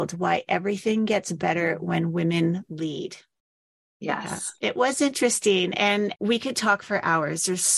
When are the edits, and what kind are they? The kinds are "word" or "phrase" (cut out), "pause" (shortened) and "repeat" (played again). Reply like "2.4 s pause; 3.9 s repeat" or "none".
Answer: 4.6 s pause